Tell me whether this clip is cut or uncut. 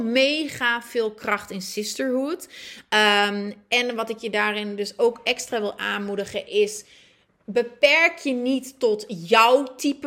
uncut